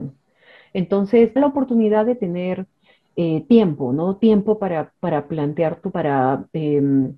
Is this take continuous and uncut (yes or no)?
no